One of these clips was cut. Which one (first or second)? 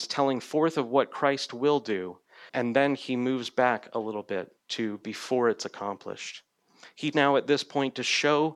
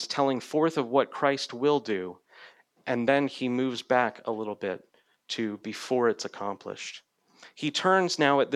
first